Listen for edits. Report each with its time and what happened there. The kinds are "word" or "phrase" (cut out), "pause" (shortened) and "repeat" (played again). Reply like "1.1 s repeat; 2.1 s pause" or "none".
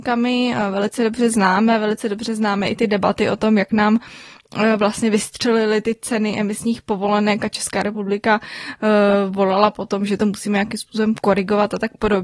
none

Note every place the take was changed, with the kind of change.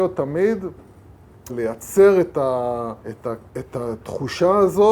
1.5 s word; 3.0 s pause; 3.5 s pause

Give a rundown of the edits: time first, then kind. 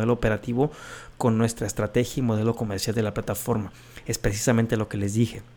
none

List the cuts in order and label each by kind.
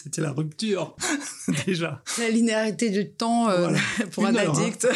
none

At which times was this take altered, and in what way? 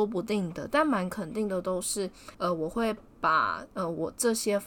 2.3 s pause

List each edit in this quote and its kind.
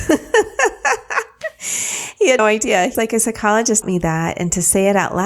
2.4 s word; 2.9 s word; 3.8 s word

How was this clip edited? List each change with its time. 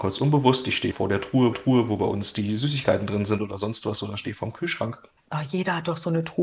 0.9 s word; 1.5 s repeat

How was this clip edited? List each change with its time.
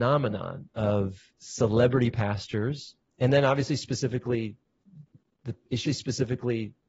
1.4 s word; 5.9 s repeat

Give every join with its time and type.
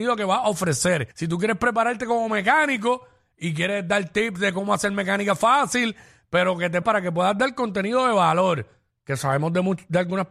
1.1 s pause; 6.8 s word

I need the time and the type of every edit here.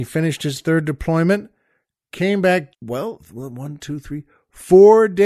2.1 s word; 2.7 s word

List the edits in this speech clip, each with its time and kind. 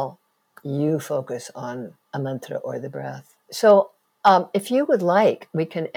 2.0 s pause; 3.4 s pause

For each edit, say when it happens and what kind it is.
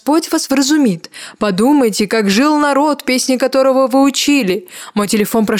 none

